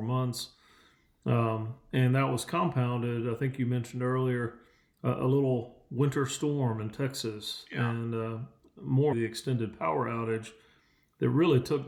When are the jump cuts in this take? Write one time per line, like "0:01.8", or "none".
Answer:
0:09.1